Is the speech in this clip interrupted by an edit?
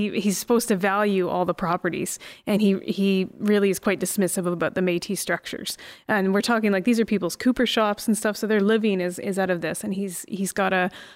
no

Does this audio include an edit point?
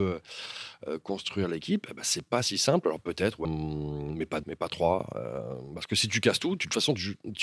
yes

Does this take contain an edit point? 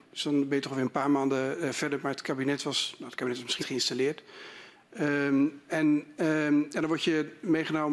yes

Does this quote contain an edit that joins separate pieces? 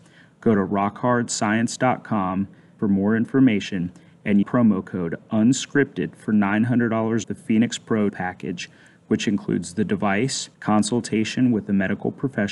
yes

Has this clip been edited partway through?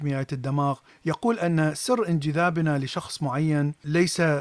no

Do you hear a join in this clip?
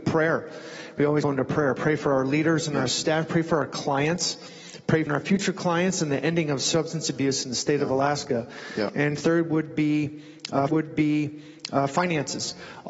yes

